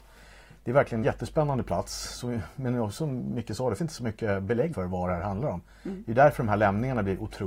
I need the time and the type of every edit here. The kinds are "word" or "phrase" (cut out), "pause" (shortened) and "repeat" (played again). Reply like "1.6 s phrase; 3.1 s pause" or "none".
1.0 s word; 3.8 s word; 4.7 s word

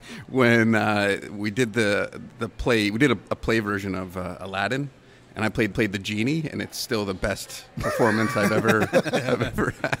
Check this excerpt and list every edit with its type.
5.7 s repeat

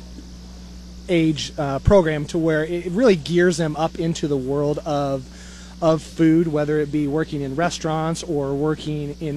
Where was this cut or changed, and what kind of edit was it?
none

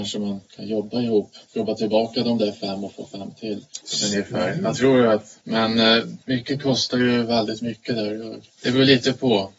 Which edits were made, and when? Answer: 6.2 s pause; 8.5 s pause

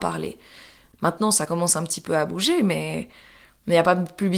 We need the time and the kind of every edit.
none

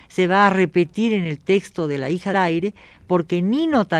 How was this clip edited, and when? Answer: 2.3 s word

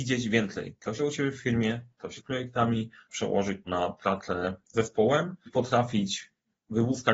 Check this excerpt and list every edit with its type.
1.0 s word; 2.2 s word; 3.1 s word; 3.7 s word; 4.7 s word; 5.5 s word

